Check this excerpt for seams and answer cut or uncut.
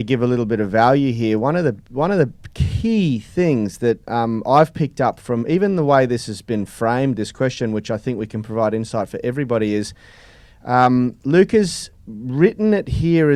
uncut